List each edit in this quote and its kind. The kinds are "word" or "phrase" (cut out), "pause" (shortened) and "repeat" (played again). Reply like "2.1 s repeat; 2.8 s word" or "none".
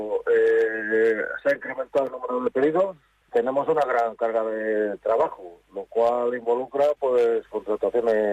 3.3 s word